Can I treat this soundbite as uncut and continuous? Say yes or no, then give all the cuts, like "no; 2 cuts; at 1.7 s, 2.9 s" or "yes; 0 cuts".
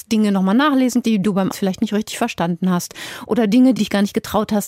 no; 3 cuts; at 1.0 s, 1.5 s, 3.8 s